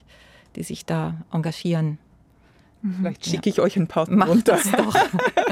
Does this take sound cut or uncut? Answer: uncut